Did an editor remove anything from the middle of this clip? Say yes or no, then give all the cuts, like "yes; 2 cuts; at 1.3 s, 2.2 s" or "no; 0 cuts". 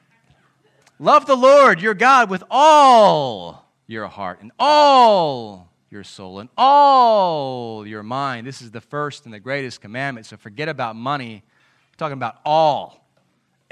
no; 0 cuts